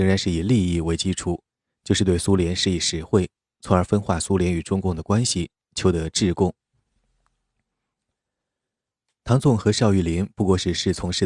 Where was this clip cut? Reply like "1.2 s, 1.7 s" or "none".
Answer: none